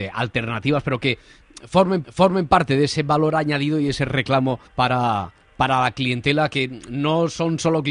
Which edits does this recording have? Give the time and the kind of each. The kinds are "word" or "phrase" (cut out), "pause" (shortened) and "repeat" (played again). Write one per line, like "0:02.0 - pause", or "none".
0:02.0 - repeat
0:04.7 - pause